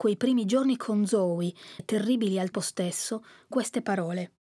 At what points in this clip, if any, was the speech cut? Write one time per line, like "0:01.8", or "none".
0:01.8
0:02.5
0:03.5